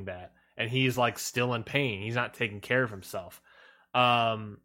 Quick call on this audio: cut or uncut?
uncut